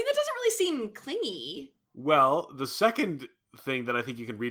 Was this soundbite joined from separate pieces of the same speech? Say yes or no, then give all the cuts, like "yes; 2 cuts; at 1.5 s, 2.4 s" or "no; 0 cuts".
no; 0 cuts